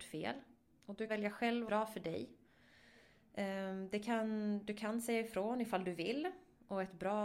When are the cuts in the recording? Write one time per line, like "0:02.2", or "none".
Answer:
0:01.1
0:01.7